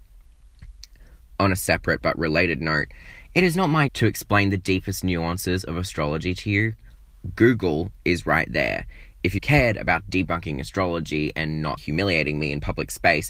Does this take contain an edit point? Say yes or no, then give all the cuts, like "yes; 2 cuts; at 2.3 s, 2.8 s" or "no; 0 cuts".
yes; 3 cuts; at 3.9 s, 9.4 s, 11.8 s